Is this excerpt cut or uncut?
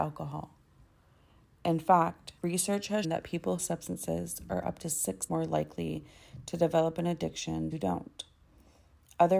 cut